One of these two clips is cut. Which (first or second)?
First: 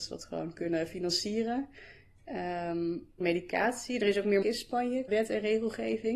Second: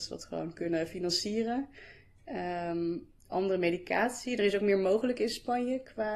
first